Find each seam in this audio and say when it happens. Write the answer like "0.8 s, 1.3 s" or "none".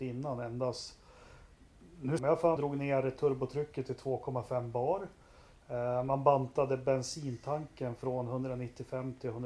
2.2 s, 2.6 s